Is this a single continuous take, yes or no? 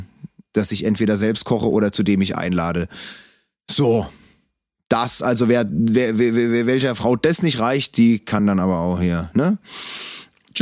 yes